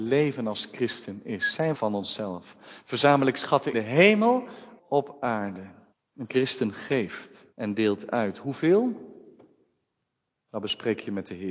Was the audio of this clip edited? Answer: yes; 5 cuts; at 1.7 s, 3.7 s, 4.8 s, 5.9 s, 7.5 s

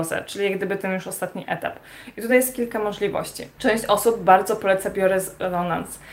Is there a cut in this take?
no; 0 cuts

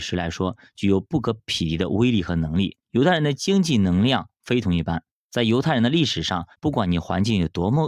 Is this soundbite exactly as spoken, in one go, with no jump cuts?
no; 2 cuts; at 2.8 s, 6.5 s

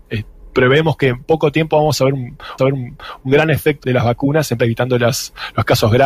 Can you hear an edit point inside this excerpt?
yes; 3 cuts; at 2.6 s, 3.8 s, 4.6 s

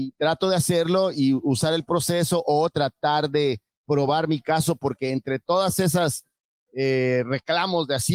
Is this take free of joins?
yes; 0 cuts

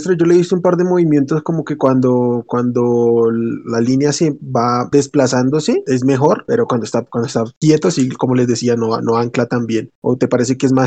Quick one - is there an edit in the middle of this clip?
no; 0 cuts

